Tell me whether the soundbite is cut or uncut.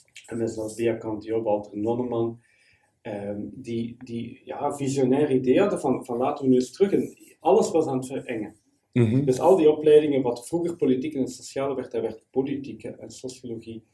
uncut